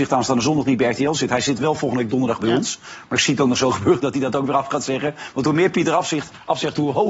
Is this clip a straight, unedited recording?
yes; 0 cuts

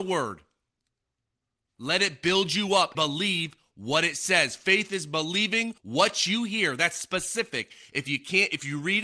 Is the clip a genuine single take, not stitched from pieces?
no; 2 cuts; at 2.9 s, 5.8 s

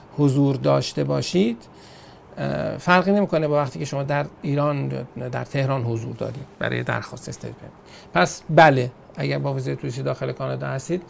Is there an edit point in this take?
no; 0 cuts

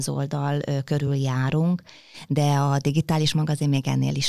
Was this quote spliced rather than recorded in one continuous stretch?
no; 0 cuts

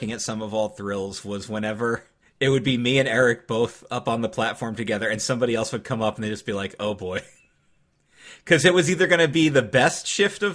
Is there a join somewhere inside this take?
yes; 1 cut; at 2.2 s

